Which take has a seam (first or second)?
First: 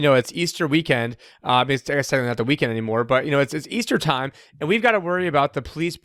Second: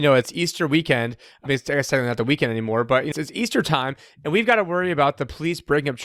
second